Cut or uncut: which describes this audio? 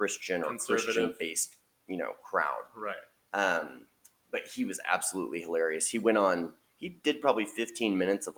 uncut